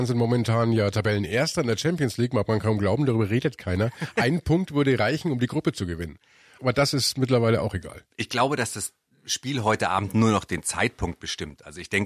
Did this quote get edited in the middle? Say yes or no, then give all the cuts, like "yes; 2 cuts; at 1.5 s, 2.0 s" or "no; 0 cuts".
no; 0 cuts